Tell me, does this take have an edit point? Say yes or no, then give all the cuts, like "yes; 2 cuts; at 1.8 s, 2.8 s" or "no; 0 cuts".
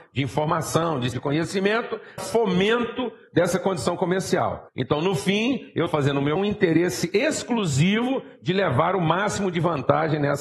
yes; 5 cuts; at 1.1 s, 2.2 s, 4.7 s, 5.9 s, 6.4 s